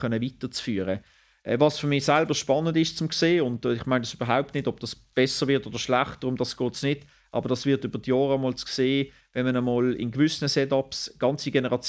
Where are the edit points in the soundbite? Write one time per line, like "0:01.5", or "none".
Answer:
none